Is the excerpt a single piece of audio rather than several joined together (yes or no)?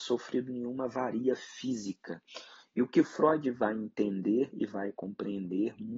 yes